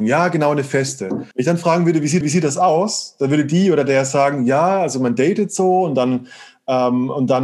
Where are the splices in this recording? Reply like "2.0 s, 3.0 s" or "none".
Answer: 1.3 s, 2.2 s